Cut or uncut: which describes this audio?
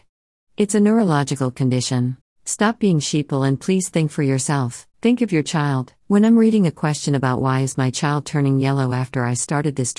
cut